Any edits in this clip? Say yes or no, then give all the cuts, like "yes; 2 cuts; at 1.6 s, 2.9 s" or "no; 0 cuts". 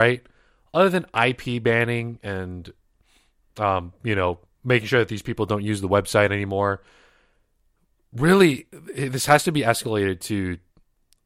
no; 0 cuts